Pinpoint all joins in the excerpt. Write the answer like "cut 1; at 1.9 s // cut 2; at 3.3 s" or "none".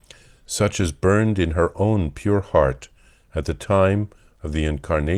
none